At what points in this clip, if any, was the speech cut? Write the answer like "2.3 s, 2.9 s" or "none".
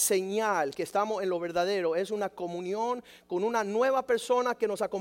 none